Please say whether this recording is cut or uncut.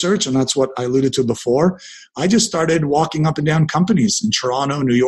uncut